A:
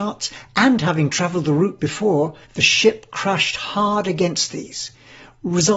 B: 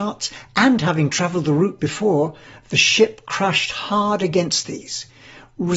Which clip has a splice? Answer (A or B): A